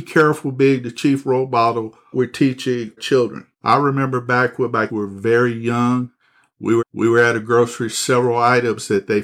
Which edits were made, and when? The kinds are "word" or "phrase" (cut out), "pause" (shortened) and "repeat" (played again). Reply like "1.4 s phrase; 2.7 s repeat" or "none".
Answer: 2.1 s word; 3.0 s word; 3.5 s pause; 4.9 s word; 6.8 s repeat; 7.9 s phrase